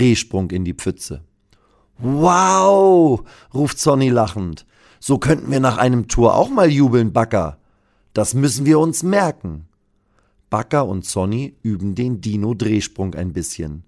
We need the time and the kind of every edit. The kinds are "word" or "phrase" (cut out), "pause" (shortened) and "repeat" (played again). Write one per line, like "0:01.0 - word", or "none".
none